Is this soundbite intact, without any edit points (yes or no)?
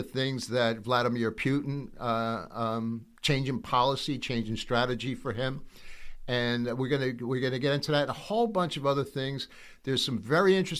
yes